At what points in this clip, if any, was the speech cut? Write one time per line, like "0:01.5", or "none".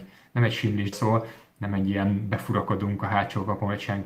0:00.9